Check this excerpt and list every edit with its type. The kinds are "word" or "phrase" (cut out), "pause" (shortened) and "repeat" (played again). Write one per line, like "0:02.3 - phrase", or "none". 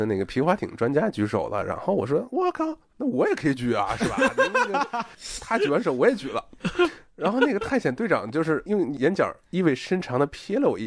none